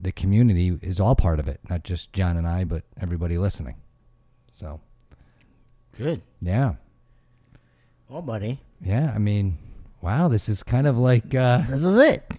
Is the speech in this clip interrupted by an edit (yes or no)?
no